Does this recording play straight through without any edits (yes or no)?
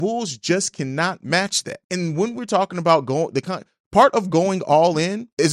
yes